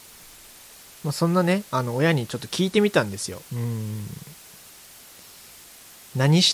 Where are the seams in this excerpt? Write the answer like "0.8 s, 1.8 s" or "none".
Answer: 3.5 s